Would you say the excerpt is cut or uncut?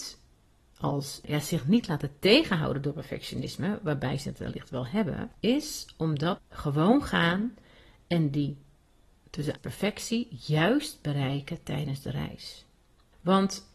cut